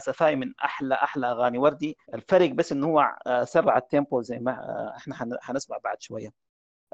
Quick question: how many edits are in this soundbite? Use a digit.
1